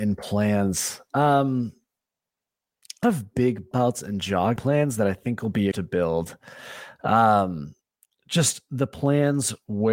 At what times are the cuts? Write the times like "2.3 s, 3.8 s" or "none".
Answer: 3.0 s, 3.7 s, 4.6 s, 5.7 s, 7.9 s